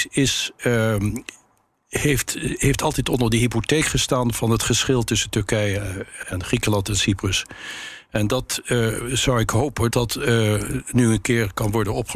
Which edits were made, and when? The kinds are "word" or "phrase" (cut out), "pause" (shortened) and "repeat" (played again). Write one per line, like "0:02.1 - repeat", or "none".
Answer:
0:06.2 - word
0:09.9 - word